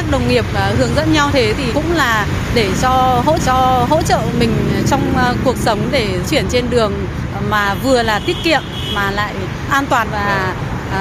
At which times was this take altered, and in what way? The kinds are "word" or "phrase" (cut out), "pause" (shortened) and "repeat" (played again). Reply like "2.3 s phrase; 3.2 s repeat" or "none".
1.3 s word; 1.7 s word; 3.4 s repeat; 6.2 s word; 10.0 s word